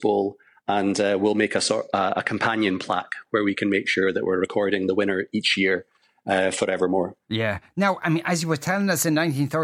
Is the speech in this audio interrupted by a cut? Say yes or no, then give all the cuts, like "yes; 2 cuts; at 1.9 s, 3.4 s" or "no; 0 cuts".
no; 0 cuts